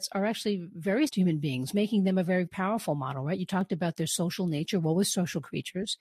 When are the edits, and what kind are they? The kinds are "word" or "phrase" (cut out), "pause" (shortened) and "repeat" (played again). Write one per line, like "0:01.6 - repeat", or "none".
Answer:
0:01.1 - word
0:02.5 - word